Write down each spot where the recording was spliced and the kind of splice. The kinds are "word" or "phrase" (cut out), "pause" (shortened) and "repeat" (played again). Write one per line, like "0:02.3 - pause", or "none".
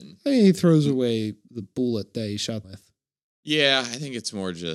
0:01.5 - word
0:02.6 - phrase